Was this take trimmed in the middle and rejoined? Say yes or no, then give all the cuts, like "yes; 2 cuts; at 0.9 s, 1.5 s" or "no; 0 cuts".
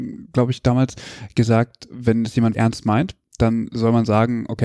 yes; 1 cut; at 2.5 s